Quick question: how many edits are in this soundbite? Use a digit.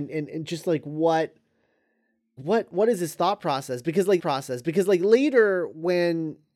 2